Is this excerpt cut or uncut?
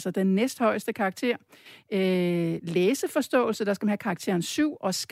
uncut